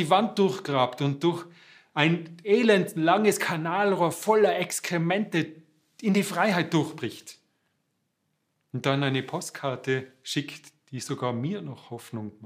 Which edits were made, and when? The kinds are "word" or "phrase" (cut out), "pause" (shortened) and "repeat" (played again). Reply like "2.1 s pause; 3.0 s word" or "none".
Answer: none